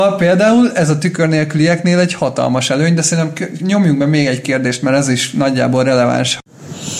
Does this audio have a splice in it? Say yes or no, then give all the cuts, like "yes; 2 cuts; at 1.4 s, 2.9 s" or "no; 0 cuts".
no; 0 cuts